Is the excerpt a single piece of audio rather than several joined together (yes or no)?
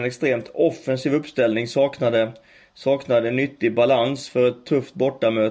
yes